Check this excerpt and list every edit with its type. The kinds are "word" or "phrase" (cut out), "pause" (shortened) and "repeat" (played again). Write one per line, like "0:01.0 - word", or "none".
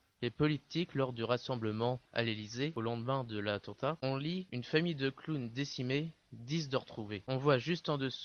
0:02.0 - pause